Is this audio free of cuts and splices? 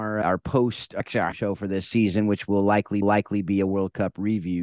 no; 3 cuts; at 1.0 s, 1.3 s, 3.0 s

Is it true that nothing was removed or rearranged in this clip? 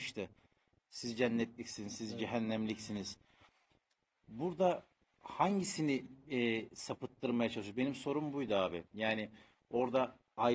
yes; 0 cuts

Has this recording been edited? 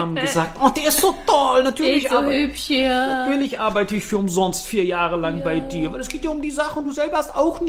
no; 0 cuts

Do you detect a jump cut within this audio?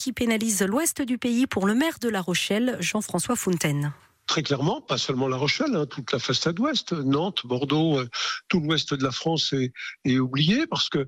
no; 0 cuts

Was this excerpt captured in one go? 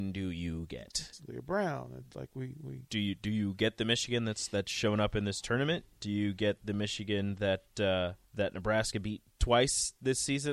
no; 1 cut; at 8.2 s

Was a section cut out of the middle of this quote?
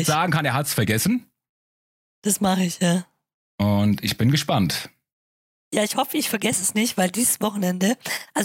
no; 0 cuts

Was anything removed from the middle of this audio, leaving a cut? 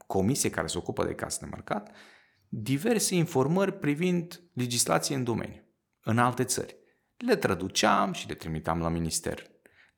no; 0 cuts

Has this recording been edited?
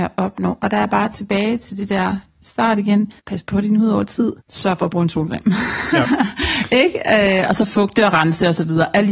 yes; 2 cuts; at 3.2 s, 4.4 s

